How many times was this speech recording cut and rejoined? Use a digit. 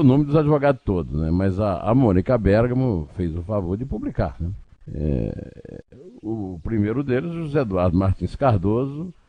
1